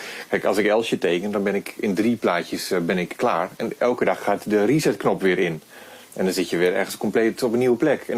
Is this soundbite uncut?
no; 1 cut; at 3.8 s

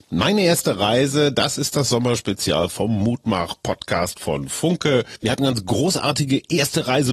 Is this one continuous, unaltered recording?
no; 1 cut; at 5.4 s

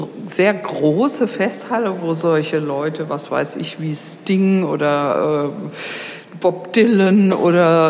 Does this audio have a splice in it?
no; 0 cuts

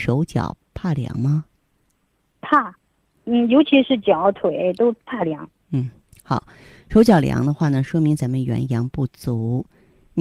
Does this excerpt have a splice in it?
no; 0 cuts

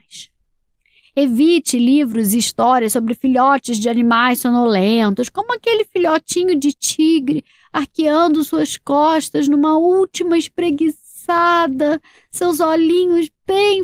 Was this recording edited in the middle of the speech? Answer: no; 0 cuts

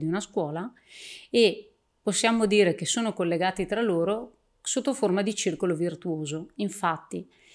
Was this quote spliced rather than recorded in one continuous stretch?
no; 0 cuts

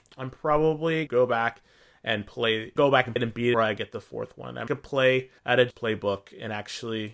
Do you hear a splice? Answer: yes; 7 cuts; at 1.1 s, 2.8 s, 3.2 s, 3.5 s, 4.7 s, 5.4 s, 5.7 s

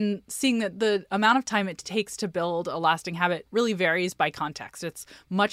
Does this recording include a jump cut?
no; 0 cuts

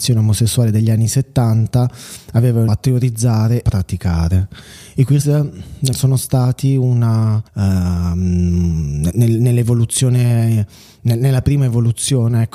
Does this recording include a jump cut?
yes; 5 cuts; at 2.7 s, 3.6 s, 5.2 s, 5.9 s, 7.5 s

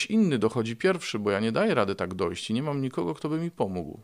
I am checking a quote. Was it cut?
no; 0 cuts

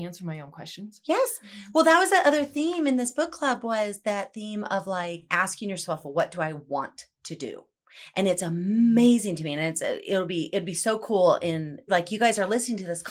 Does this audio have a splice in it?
no; 0 cuts

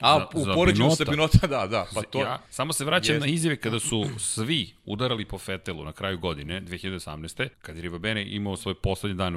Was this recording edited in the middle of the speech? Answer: yes; 2 cuts; at 2.5 s, 7.5 s

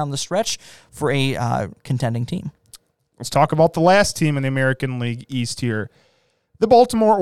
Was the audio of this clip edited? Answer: no; 0 cuts

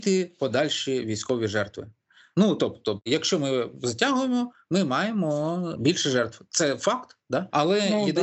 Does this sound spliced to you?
no; 0 cuts

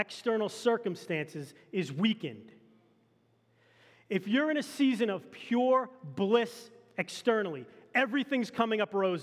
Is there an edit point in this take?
no; 0 cuts

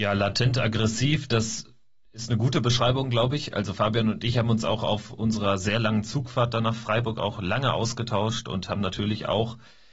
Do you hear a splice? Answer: no; 0 cuts

